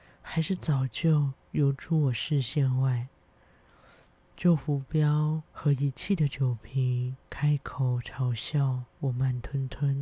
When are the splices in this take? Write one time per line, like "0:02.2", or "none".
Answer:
0:05.5
0:07.2
0:08.9